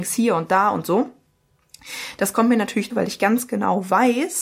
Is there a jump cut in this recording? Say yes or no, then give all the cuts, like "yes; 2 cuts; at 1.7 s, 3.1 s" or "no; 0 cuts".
yes; 1 cut; at 2.9 s